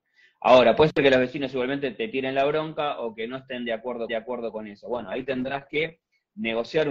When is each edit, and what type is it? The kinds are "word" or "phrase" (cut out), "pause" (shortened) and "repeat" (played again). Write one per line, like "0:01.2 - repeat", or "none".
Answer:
0:04.1 - repeat